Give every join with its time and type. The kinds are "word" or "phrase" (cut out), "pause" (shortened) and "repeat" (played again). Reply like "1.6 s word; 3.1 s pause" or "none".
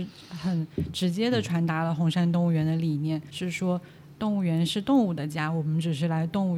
3.3 s word